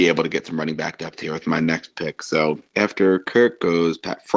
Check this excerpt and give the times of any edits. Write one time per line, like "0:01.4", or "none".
0:02.7